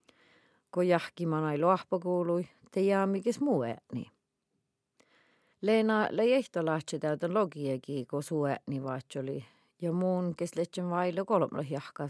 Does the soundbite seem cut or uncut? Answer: uncut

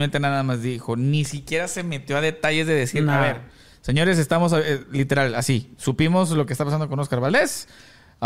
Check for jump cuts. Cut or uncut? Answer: uncut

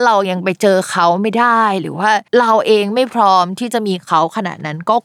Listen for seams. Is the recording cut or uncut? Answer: cut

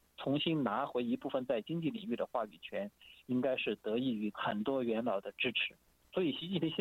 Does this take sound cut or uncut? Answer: uncut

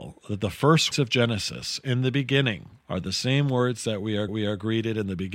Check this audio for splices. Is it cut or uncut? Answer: cut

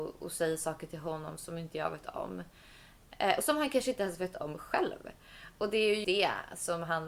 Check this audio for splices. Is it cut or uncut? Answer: cut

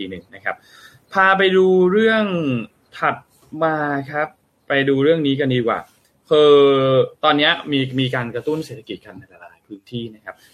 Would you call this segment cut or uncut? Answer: uncut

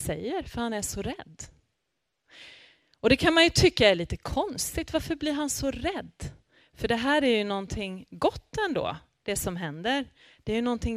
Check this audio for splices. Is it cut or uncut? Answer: uncut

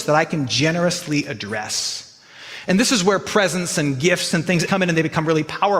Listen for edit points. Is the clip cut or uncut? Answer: cut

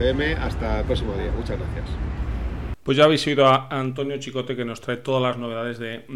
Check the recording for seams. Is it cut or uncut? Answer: cut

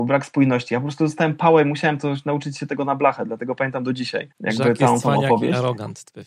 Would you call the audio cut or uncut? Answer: cut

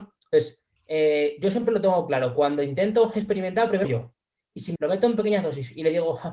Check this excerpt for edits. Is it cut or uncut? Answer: cut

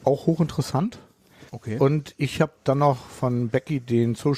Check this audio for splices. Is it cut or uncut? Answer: cut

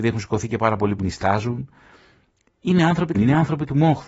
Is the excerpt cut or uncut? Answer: cut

